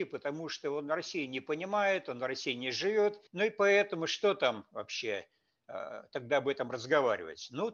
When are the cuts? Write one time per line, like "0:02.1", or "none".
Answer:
0:03.3